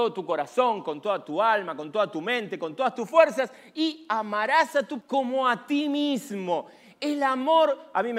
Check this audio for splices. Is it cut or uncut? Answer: cut